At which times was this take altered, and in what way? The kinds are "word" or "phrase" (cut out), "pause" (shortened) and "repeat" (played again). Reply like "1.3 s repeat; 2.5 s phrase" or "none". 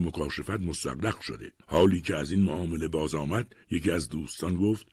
1.6 s pause; 3.6 s pause